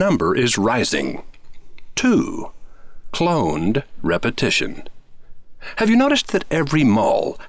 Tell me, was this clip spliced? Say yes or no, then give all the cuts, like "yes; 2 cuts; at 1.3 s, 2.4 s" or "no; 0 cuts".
no; 0 cuts